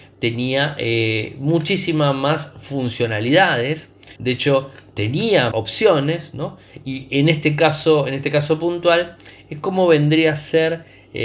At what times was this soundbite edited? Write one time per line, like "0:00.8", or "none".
0:04.2
0:05.5